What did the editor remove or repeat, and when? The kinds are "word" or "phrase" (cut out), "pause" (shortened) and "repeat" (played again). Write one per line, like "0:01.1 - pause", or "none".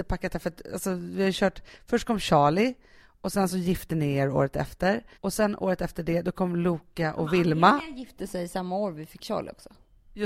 0:05.1 - pause